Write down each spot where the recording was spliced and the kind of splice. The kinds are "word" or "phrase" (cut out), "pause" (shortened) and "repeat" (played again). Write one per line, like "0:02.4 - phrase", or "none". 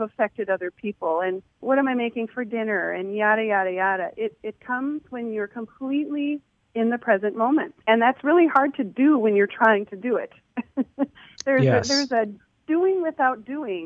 0:01.5 - pause
0:06.6 - pause
0:07.8 - pause